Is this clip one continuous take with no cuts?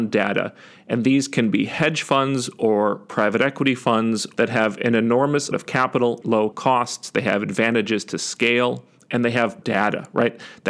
no; 4 cuts; at 5.5 s, 6.2 s, 6.5 s, 9.6 s

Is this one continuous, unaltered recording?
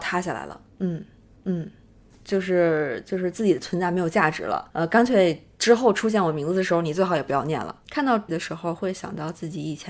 no; 3 cuts; at 1.4 s, 4.7 s, 8.3 s

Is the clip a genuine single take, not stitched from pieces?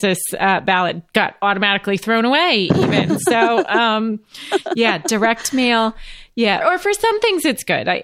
no; 1 cut; at 6.6 s

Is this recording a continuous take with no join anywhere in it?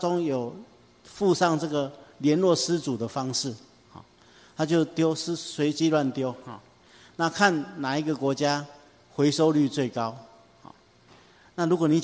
yes; 0 cuts

